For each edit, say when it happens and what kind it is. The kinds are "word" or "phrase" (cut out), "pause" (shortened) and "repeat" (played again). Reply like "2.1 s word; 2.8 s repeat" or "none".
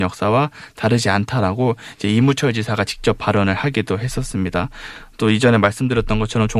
none